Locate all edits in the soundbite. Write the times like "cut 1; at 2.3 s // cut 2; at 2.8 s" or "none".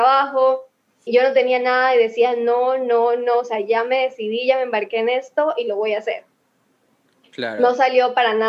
cut 1; at 1.1 s

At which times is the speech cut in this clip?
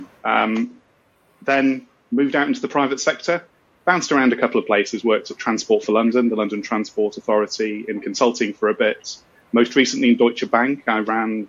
none

